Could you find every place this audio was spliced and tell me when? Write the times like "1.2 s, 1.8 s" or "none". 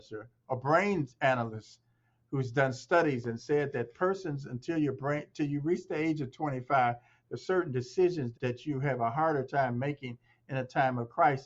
8.3 s